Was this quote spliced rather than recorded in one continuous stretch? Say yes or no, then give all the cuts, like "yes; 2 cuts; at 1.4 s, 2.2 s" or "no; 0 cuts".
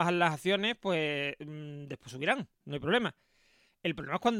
no; 0 cuts